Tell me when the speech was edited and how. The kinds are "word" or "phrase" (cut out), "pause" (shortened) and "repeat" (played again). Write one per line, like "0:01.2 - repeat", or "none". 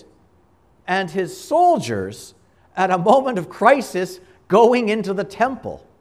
none